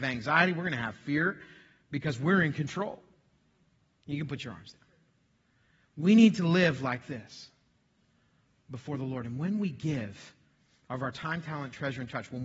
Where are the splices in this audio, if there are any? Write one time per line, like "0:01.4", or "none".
none

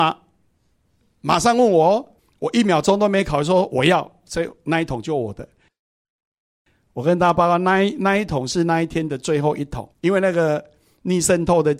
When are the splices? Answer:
0:02.2
0:09.9

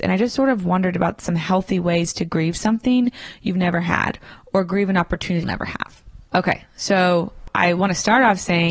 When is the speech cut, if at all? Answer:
0:05.4

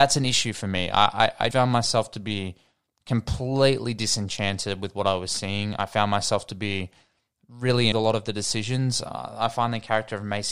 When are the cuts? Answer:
0:01.5
0:07.9

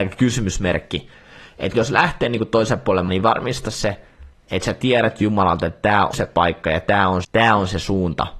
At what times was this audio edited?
0:01.7
0:03.1
0:06.1
0:07.2

